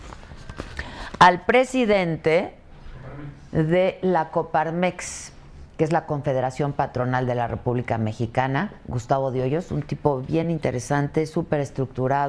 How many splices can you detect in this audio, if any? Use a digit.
0